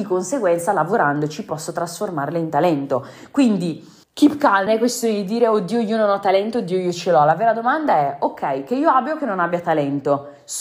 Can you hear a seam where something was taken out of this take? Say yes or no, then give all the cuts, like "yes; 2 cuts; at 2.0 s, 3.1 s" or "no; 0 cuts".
yes; 2 cuts; at 4.0 s, 4.7 s